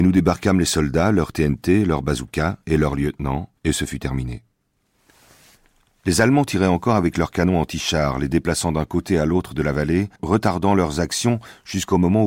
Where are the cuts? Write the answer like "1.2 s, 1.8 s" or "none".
3.6 s, 10.2 s